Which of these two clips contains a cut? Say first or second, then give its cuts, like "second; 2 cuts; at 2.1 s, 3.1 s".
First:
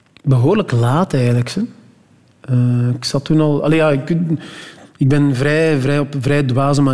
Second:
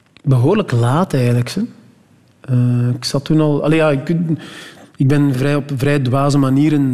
second; 1 cut; at 5.3 s